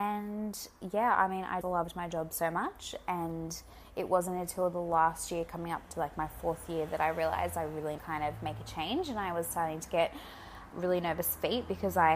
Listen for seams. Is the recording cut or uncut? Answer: cut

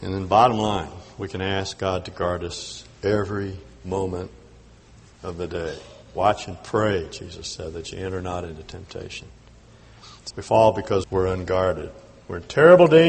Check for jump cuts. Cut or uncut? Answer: cut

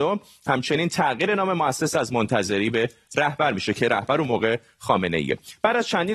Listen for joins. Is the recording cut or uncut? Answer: uncut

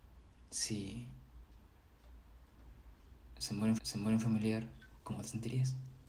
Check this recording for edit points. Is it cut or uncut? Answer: cut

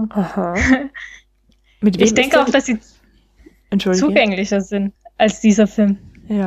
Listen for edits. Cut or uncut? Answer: uncut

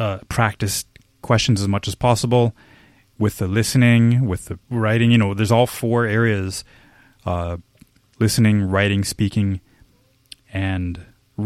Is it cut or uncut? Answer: uncut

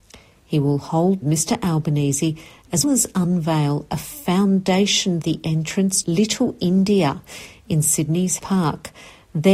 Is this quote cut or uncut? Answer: cut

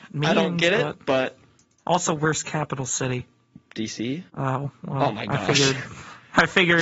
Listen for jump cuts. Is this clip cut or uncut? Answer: cut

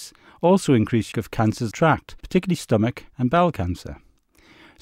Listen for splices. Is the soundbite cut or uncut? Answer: cut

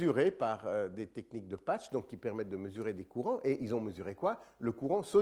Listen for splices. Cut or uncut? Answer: uncut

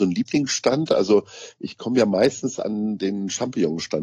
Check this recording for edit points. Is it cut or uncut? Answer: uncut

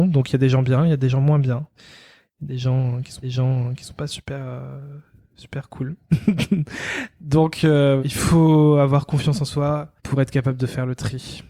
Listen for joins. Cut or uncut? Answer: cut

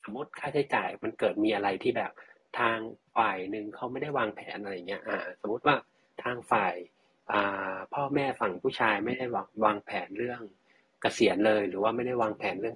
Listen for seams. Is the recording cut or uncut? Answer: uncut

